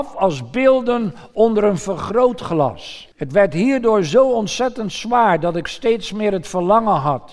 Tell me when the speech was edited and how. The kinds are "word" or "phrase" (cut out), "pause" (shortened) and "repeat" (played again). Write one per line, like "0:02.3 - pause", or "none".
0:03.1 - pause